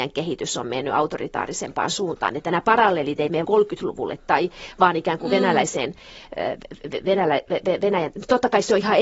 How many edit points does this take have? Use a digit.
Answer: 1